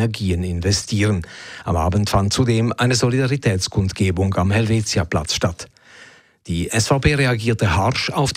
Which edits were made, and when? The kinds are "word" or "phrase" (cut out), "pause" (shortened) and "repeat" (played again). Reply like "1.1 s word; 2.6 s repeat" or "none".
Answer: none